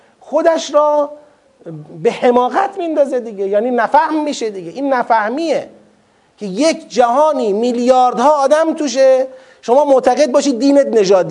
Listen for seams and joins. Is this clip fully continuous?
yes; 0 cuts

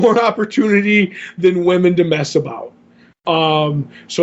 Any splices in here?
no; 0 cuts

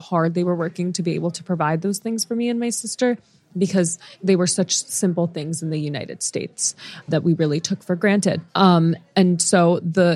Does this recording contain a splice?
yes; 3 cuts; at 4.1 s, 7.1 s, 8.5 s

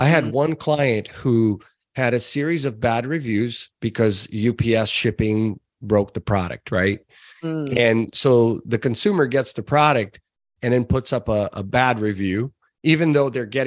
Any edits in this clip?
no; 0 cuts

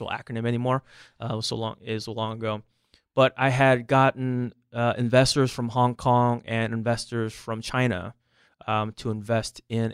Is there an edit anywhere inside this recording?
no; 0 cuts

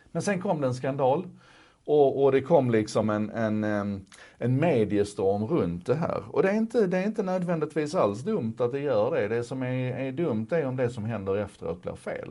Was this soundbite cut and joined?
no; 0 cuts

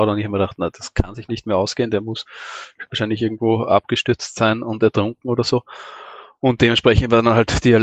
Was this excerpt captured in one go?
yes; 0 cuts

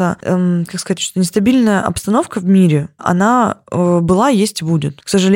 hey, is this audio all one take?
no; 2 cuts; at 1.0 s, 3.0 s

